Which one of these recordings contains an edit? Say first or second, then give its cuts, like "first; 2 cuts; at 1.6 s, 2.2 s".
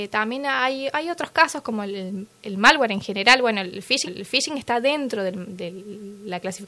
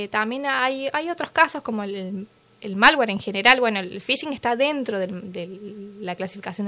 first; 2 cuts; at 2.3 s, 4.1 s